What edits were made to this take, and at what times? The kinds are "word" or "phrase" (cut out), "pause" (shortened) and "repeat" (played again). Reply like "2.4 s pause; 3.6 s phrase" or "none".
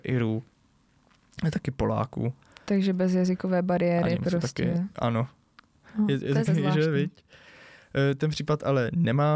6.4 s word